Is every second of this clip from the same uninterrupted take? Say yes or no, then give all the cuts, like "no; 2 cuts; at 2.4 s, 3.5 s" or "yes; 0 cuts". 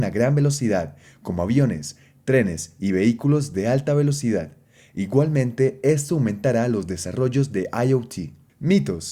yes; 0 cuts